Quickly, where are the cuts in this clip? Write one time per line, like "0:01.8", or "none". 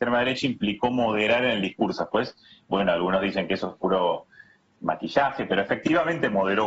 none